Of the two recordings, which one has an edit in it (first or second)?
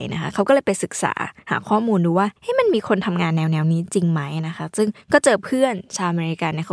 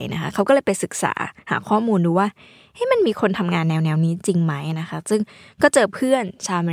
first